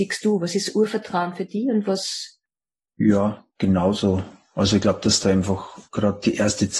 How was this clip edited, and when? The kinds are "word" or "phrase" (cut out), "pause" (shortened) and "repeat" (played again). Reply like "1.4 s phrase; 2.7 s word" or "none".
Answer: 3.5 s pause; 5.9 s pause